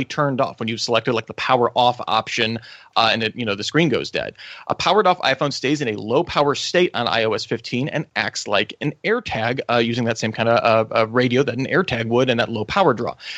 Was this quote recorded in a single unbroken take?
yes; 0 cuts

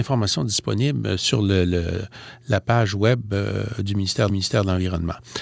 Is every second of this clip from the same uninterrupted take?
no; 1 cut; at 4.3 s

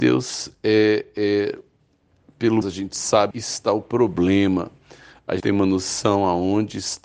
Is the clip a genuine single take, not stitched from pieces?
no; 3 cuts; at 2.6 s, 3.3 s, 5.4 s

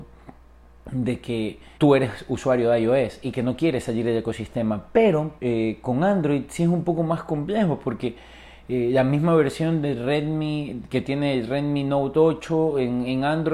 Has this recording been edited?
yes; 2 cuts; at 1.8 s, 5.4 s

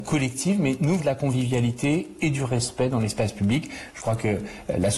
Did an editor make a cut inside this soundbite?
yes; 1 cut; at 1.0 s

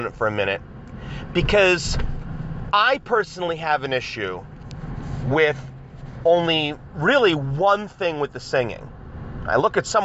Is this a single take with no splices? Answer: yes; 0 cuts

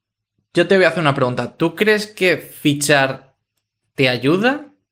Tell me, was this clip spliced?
no; 0 cuts

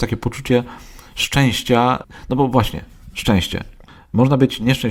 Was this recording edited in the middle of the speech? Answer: no; 0 cuts

